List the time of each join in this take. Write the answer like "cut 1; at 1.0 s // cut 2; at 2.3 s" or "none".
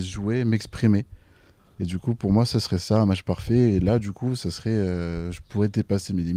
none